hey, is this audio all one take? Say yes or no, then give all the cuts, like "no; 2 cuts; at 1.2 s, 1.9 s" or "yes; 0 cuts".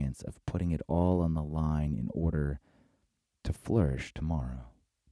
yes; 0 cuts